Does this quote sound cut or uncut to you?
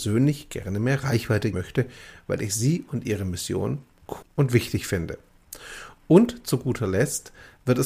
cut